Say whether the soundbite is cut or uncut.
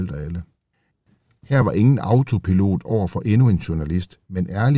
uncut